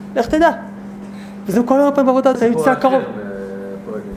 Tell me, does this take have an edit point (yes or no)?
yes